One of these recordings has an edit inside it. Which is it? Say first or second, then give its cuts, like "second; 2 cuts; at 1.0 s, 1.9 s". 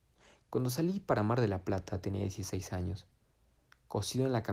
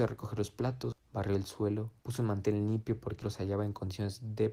second; 3 cuts; at 0.9 s, 2.0 s, 3.2 s